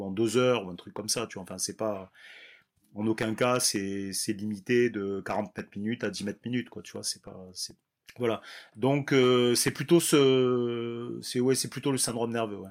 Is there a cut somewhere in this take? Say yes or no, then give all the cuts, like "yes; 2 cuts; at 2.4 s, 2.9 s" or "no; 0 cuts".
no; 0 cuts